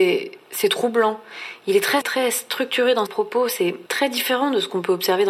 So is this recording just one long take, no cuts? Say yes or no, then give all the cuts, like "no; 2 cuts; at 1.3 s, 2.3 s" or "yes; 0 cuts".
no; 3 cuts; at 2.0 s, 3.1 s, 3.9 s